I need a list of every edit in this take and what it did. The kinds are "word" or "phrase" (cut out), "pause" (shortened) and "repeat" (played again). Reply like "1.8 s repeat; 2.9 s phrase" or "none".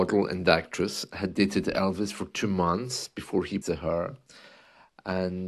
3.6 s word